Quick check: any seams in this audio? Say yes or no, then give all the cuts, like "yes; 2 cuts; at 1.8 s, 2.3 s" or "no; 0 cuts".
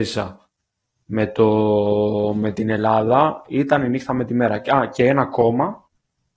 no; 0 cuts